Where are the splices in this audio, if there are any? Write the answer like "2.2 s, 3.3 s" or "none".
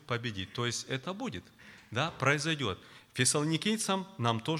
none

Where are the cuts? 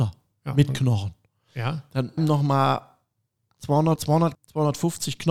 2.2 s, 4.0 s, 4.3 s

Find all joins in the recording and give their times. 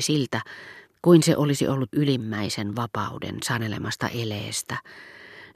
1.9 s

